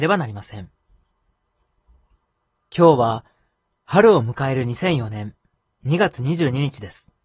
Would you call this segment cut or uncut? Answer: uncut